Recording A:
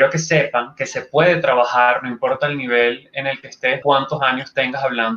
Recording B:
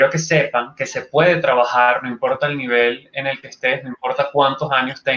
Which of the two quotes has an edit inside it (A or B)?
A